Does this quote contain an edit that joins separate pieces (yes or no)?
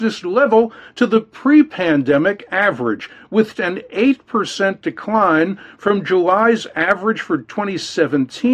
yes